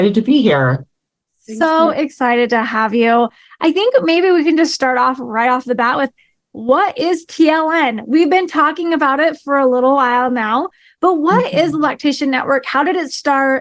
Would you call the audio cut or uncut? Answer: uncut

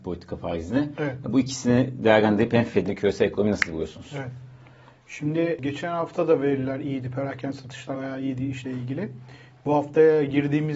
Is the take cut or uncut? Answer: cut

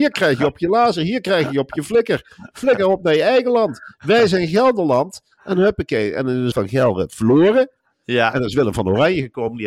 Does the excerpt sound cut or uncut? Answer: cut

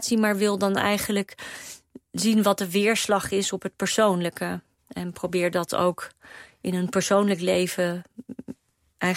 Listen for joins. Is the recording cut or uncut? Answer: uncut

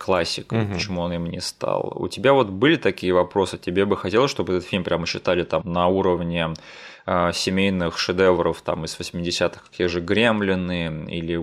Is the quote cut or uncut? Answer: cut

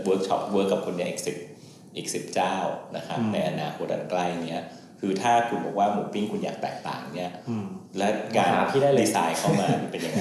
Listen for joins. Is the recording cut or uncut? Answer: uncut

